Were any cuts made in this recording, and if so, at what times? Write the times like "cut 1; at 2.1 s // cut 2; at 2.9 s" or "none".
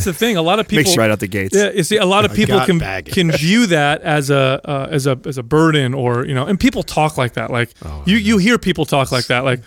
cut 1; at 0.9 s // cut 2; at 7.7 s

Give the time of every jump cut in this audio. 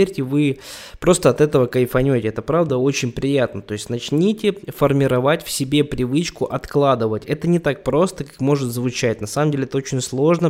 none

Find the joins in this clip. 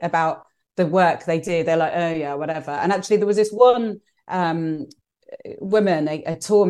none

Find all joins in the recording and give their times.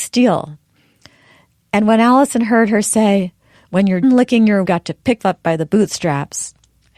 cut 1; at 4.0 s // cut 2; at 4.6 s // cut 3; at 5.2 s

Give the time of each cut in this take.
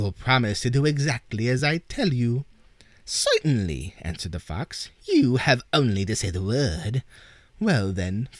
none

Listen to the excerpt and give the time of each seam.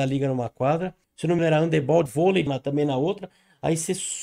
cut 1; at 1.0 s // cut 2; at 1.4 s // cut 3; at 2.1 s // cut 4; at 2.5 s

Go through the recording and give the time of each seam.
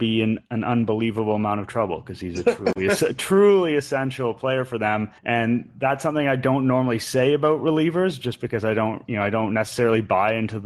cut 1; at 5.2 s

